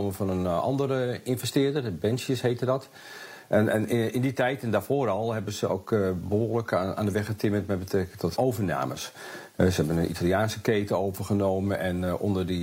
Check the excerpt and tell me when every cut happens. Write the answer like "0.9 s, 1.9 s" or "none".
8.4 s